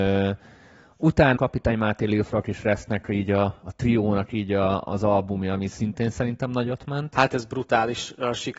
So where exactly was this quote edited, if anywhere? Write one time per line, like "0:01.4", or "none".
0:01.4